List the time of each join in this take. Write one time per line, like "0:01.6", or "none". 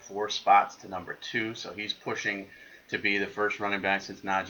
none